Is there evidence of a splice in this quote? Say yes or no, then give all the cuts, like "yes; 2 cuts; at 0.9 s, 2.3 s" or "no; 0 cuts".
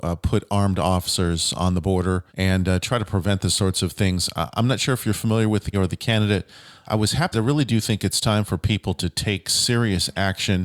yes; 3 cuts; at 2.3 s, 5.7 s, 7.3 s